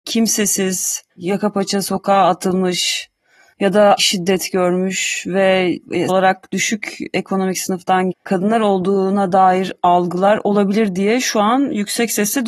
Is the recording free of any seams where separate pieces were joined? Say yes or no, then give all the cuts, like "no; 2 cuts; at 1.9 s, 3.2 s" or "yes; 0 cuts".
no; 4 cuts; at 1.1 s, 4.0 s, 6.1 s, 8.1 s